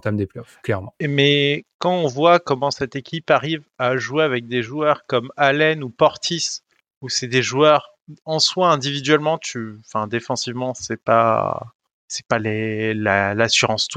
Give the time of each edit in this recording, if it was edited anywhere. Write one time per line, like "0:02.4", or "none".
none